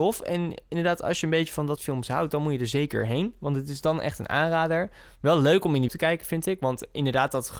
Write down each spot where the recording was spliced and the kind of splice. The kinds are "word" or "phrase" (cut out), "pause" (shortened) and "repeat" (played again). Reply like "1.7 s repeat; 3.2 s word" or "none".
1.8 s word; 5.9 s word

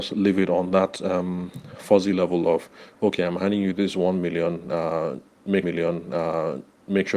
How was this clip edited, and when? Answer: 5.6 s repeat

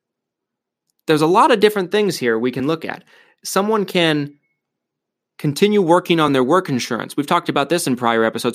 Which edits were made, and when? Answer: none

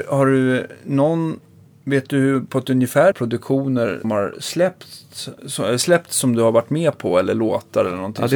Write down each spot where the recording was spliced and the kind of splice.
3.1 s phrase; 4.0 s word; 5.4 s pause

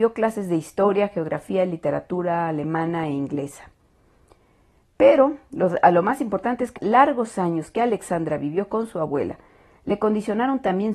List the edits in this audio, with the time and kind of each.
6.8 s word

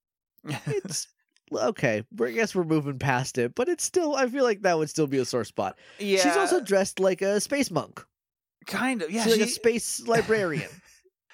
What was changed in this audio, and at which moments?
none

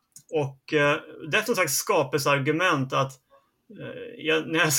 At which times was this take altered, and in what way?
1.5 s word

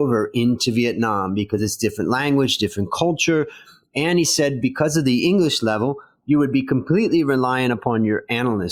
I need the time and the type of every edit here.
none

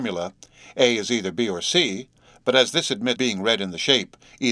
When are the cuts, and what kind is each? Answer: 3.2 s word

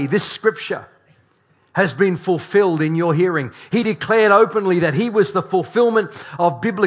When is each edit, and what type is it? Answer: none

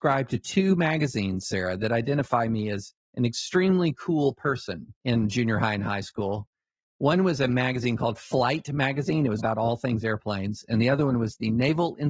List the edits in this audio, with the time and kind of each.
3.0 s pause; 5.0 s pause; 9.4 s word

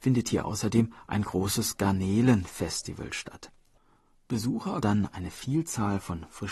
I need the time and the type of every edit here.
4.8 s word

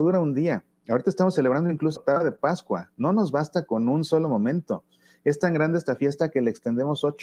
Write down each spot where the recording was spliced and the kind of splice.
2.0 s word

